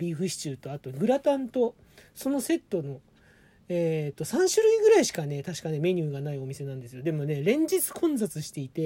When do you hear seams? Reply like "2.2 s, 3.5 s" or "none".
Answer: none